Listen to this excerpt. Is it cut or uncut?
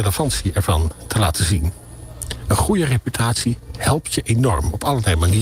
uncut